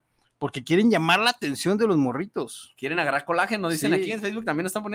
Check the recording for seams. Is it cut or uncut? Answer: uncut